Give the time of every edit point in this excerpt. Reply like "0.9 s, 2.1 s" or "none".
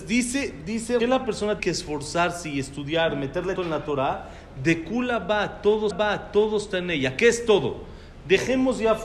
1.0 s, 1.6 s, 3.6 s, 5.9 s